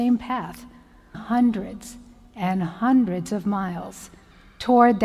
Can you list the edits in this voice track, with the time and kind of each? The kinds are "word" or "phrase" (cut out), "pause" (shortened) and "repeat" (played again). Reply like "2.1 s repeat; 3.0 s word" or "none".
1.1 s word